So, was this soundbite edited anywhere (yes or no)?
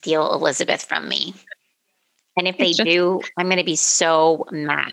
no